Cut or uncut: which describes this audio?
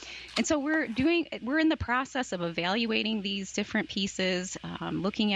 uncut